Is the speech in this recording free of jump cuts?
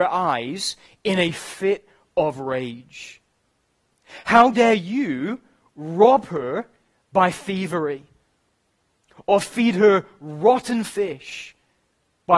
yes; 0 cuts

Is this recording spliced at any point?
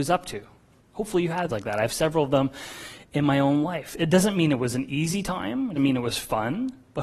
yes; 2 cuts; at 1.5 s, 5.8 s

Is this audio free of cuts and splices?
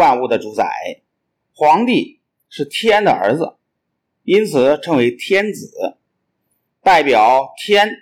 yes; 0 cuts

